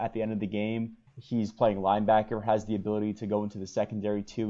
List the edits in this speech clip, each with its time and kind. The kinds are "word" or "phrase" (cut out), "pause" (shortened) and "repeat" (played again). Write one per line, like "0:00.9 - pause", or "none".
0:01.1 - pause